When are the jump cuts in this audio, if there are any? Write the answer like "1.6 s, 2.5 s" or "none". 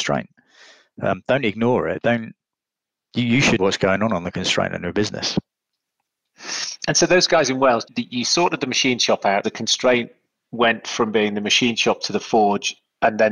3.6 s, 7.8 s, 9.4 s

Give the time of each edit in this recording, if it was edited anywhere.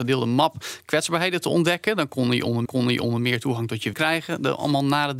2.7 s, 3.9 s

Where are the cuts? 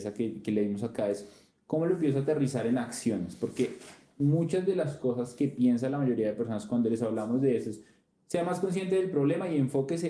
none

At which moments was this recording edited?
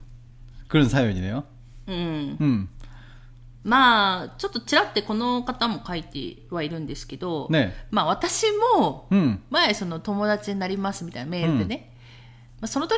none

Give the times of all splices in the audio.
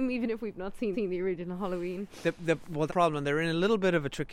0.9 s, 2.9 s

